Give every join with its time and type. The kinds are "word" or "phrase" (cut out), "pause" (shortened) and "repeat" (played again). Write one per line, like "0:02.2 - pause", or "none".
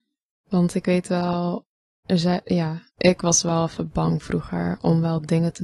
0:01.8 - pause
0:02.9 - pause